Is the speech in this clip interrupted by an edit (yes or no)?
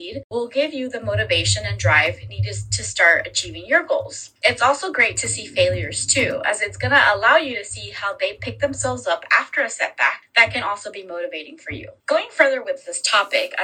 no